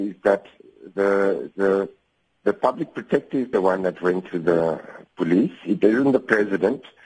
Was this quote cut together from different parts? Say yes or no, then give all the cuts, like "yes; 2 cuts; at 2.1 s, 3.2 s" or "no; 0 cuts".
no; 0 cuts